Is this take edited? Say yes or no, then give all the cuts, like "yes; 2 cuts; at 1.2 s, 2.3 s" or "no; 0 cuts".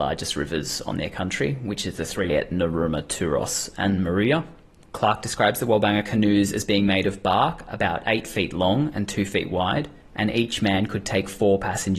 yes; 2 cuts; at 2.3 s, 10.0 s